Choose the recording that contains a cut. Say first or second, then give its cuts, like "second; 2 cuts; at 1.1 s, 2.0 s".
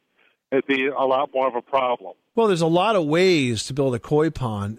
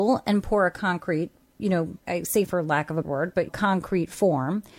second; 4 cuts; at 2.0 s, 2.4 s, 3.0 s, 3.5 s